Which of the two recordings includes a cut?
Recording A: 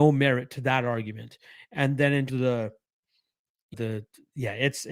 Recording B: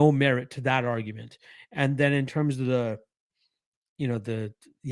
A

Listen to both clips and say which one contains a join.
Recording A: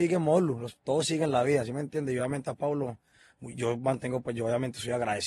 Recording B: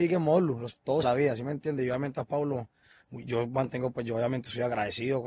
B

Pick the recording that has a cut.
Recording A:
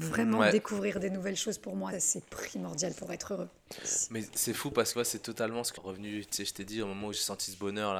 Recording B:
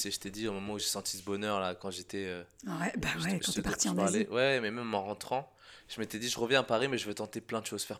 A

